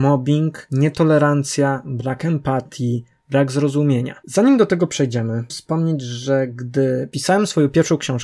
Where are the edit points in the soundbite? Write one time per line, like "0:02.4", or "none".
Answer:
0:05.5

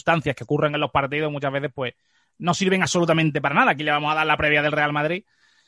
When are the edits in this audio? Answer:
none

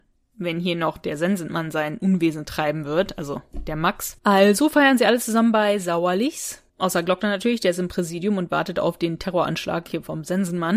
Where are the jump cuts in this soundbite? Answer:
0:04.2
0:06.7

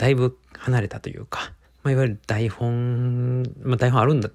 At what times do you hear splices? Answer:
0:01.6

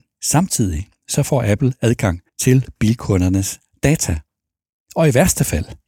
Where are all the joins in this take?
0:02.3

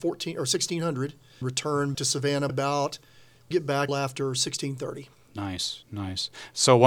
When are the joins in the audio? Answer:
0:01.4
0:01.9
0:02.5
0:03.5
0:03.9

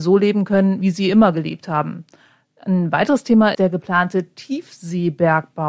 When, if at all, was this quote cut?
0:03.5

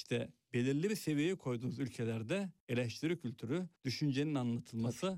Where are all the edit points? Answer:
0:02.6
0:03.8

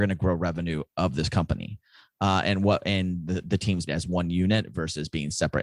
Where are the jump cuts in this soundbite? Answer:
0:03.9

